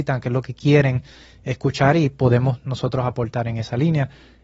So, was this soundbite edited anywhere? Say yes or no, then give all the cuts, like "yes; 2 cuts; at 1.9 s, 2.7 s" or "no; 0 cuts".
no; 0 cuts